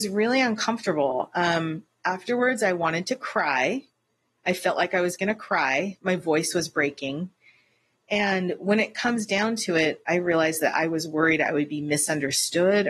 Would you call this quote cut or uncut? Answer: uncut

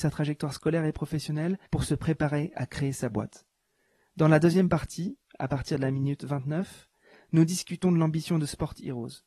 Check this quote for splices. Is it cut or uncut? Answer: cut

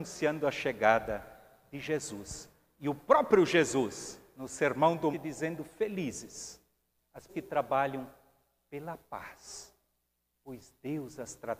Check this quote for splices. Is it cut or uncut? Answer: cut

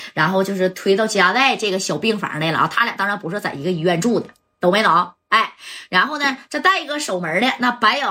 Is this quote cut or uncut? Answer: uncut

